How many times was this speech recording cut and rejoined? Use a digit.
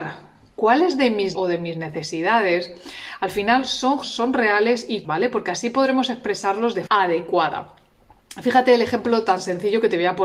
4